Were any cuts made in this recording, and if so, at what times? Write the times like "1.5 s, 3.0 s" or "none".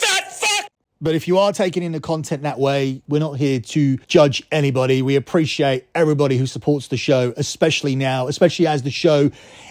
4.0 s